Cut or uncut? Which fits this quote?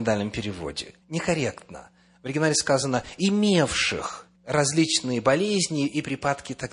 cut